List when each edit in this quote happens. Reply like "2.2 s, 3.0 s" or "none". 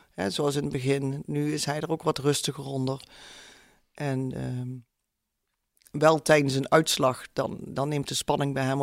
none